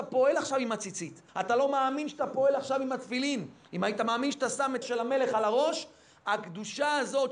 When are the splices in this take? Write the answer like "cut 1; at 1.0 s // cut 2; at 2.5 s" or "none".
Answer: cut 1; at 1.3 s // cut 2; at 4.8 s